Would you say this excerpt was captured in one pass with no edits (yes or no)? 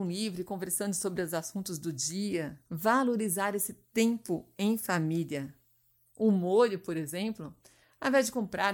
no